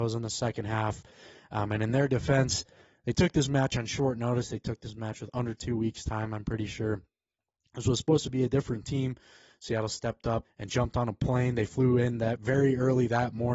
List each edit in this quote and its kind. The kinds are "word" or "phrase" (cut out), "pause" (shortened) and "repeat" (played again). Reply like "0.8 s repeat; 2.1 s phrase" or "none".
10.4 s word